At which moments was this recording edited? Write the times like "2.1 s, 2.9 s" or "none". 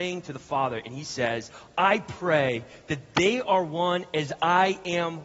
none